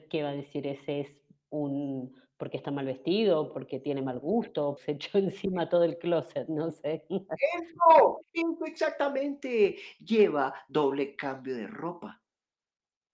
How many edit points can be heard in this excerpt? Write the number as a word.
one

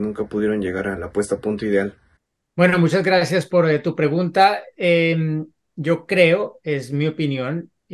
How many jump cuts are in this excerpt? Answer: zero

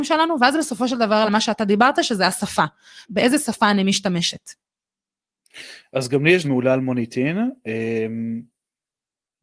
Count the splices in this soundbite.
three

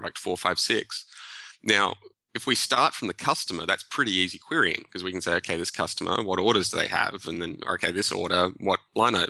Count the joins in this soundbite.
zero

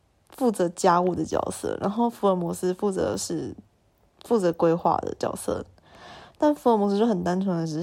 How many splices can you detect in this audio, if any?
zero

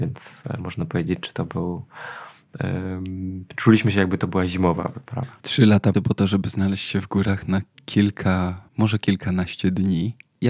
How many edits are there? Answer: three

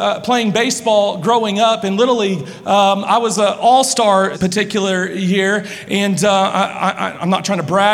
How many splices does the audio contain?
one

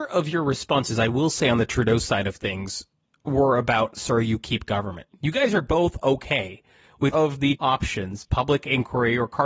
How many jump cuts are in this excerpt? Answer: three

